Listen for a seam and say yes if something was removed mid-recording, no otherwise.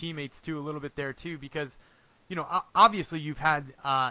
no